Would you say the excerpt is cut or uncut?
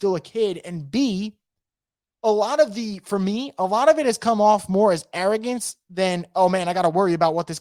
uncut